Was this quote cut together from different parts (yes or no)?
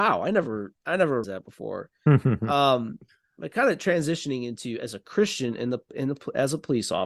yes